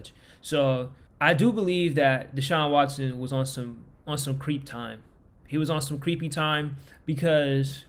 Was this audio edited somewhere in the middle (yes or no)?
yes